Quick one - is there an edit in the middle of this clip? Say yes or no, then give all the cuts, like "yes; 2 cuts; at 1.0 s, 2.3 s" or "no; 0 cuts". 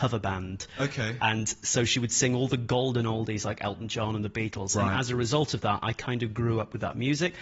no; 0 cuts